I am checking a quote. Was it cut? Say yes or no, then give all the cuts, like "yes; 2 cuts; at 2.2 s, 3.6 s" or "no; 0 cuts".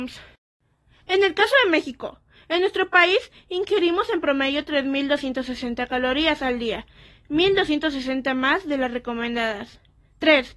no; 0 cuts